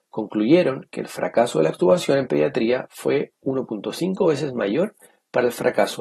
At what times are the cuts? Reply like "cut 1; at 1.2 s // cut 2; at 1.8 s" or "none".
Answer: none